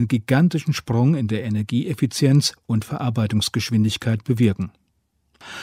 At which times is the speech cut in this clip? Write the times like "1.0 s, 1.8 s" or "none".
none